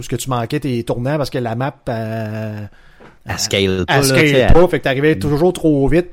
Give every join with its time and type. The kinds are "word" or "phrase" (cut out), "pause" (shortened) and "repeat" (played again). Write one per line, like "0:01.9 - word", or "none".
0:03.2 - pause